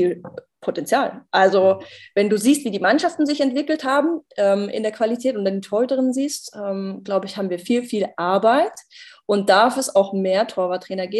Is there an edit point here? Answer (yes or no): no